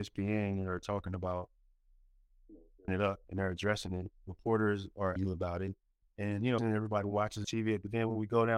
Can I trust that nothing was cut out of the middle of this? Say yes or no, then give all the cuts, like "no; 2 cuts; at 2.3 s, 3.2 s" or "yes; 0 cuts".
no; 6 cuts; at 2.9 s, 3.2 s, 5.2 s, 6.0 s, 6.6 s, 7.4 s